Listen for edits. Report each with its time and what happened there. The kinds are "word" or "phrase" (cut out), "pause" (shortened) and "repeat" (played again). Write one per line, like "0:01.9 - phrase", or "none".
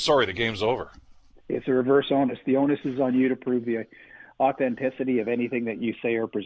none

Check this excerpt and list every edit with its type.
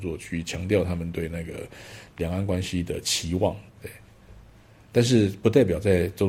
0:03.7 - pause

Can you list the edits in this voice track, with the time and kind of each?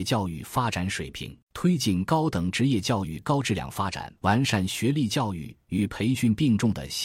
0:01.4 - pause
0:04.2 - pause

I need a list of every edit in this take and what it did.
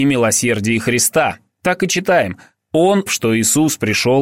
0:03.1 - word

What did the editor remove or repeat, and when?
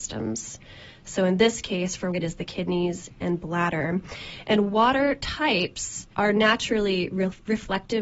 0:02.1 - word
0:06.1 - pause

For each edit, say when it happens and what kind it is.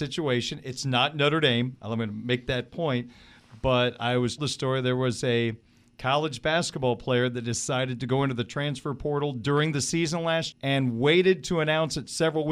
0:04.4 - word
0:10.5 - word

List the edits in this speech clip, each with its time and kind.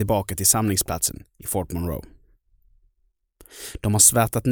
none

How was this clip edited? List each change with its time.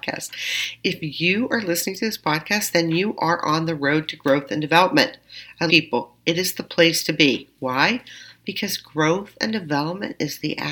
0:05.7 - phrase

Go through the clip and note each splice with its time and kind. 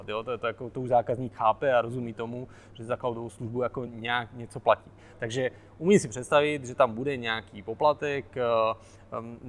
none

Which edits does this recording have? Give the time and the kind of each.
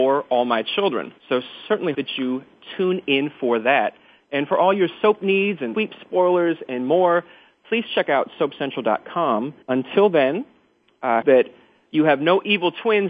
0:01.2 - pause
0:01.9 - word
0:05.7 - word
0:09.6 - pause
0:11.2 - word

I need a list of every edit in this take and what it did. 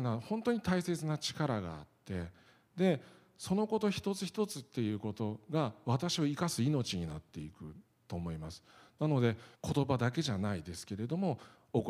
0:09.5 - pause

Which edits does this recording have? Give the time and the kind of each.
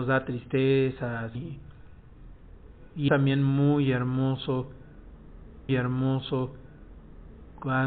0:01.4 - phrase
0:03.1 - word
0:05.7 - repeat

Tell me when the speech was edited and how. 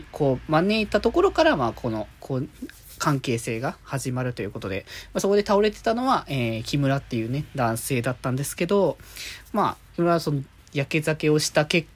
0:02.1 - pause

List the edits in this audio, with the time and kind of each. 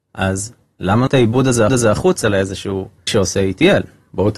0:01.1 - word
0:01.7 - repeat
0:03.1 - word

